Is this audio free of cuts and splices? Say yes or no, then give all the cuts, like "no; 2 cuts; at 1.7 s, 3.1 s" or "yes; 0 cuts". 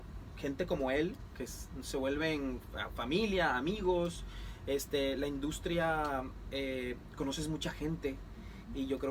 yes; 0 cuts